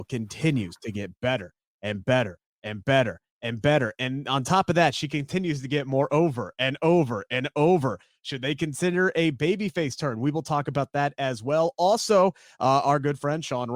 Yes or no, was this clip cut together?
no